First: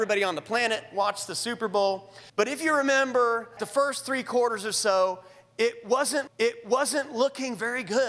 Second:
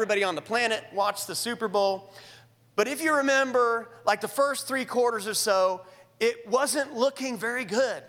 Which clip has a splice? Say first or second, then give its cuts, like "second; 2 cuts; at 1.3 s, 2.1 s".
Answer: first; 3 cuts; at 2.3 s, 3.6 s, 6.3 s